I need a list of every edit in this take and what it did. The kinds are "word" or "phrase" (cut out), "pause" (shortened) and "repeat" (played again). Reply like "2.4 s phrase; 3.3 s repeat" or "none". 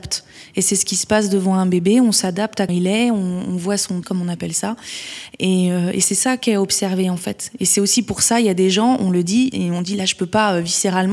2.7 s word; 4.0 s word